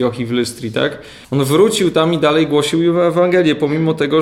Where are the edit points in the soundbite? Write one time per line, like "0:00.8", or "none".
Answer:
0:01.2